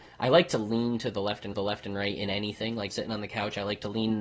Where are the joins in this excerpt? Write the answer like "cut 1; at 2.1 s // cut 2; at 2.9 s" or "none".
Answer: cut 1; at 1.5 s // cut 2; at 2.9 s